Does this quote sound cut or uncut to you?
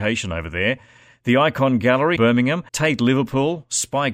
cut